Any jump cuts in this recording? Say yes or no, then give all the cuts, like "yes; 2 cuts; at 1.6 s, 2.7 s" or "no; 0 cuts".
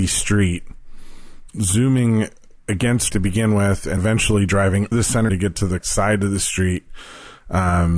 yes; 6 cuts; at 1.5 s, 3.1 s, 4.0 s, 4.9 s, 5.3 s, 5.8 s